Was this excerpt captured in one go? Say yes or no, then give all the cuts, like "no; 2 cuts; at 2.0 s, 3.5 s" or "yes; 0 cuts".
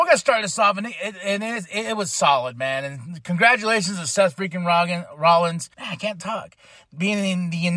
no; 1 cut; at 5.7 s